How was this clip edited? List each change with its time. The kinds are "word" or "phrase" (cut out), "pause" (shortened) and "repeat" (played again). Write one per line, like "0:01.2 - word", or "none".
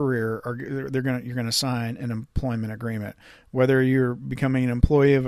none